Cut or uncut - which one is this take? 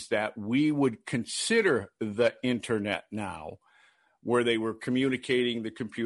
uncut